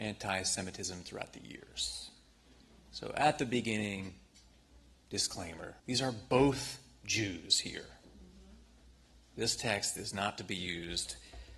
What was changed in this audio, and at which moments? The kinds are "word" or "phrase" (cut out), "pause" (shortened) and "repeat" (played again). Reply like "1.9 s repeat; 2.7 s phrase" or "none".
5.8 s pause